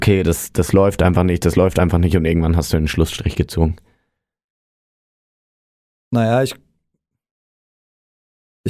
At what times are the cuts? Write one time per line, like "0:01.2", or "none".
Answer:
none